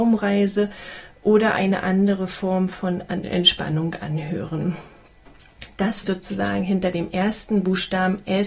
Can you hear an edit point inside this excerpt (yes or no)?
yes